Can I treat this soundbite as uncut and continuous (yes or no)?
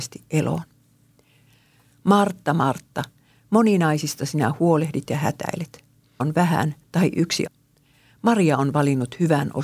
no